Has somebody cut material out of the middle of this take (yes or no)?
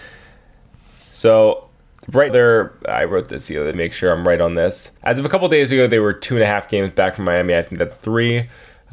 yes